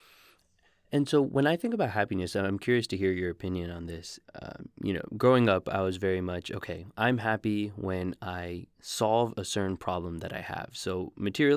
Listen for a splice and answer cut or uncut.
cut